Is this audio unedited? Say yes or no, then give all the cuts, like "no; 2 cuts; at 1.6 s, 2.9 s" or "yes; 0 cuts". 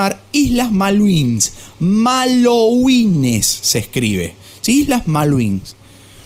yes; 0 cuts